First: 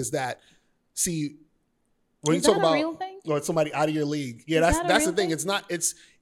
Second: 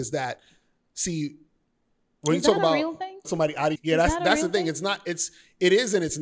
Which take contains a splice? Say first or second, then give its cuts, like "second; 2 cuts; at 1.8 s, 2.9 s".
second; 2 cuts; at 3.2 s, 3.7 s